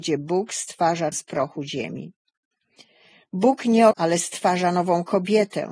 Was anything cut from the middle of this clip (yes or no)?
yes